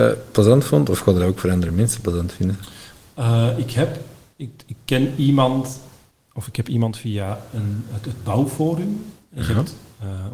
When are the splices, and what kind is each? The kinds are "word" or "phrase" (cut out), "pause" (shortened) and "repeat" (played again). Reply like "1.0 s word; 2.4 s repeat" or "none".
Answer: none